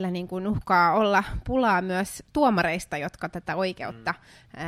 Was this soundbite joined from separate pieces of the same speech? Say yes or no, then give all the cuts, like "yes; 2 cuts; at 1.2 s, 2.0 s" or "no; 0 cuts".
no; 0 cuts